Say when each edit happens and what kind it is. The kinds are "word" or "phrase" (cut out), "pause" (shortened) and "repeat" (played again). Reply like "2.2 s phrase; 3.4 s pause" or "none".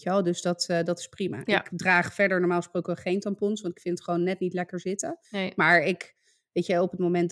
5.2 s pause